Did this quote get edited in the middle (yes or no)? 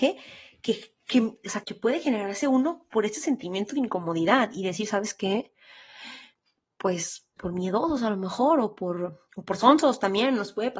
yes